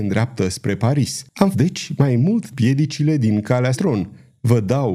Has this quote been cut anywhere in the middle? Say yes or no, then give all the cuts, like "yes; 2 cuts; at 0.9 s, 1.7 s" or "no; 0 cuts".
yes; 3 cuts; at 1.5 s, 2.5 s, 3.7 s